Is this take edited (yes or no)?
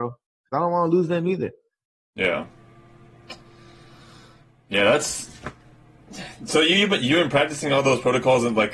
no